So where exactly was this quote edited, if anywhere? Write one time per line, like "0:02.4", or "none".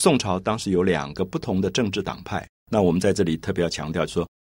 0:02.6